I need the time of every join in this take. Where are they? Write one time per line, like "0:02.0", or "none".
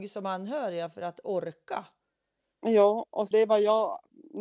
0:03.3